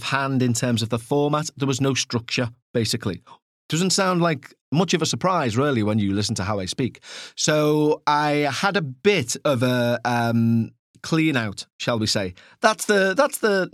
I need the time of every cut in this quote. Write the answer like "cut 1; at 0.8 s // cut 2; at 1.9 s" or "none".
none